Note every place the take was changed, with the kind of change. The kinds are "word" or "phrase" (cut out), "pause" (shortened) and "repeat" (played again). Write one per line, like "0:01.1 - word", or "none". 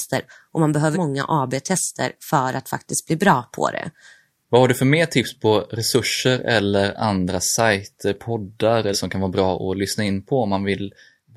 0:00.9 - word
0:08.9 - word